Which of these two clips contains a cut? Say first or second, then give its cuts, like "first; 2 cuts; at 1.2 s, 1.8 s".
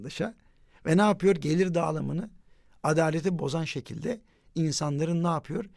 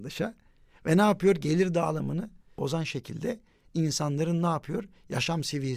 second; 1 cut; at 2.6 s